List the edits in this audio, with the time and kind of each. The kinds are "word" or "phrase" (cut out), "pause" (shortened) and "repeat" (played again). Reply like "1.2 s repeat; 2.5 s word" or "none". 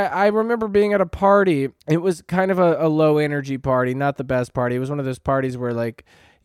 1.8 s pause

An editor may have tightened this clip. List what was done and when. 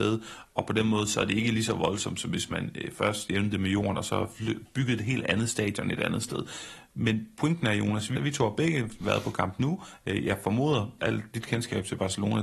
8.2 s word; 11.0 s word

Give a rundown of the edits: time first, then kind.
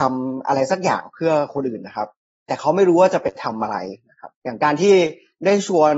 4.4 s pause

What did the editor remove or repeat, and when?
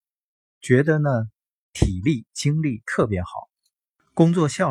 none

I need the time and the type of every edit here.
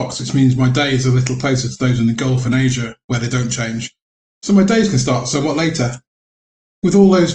none

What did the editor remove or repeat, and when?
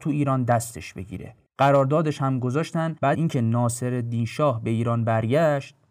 3.1 s word

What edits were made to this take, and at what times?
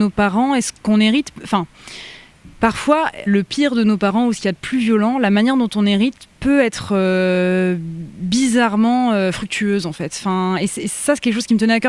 3.3 s word; 6.3 s pause

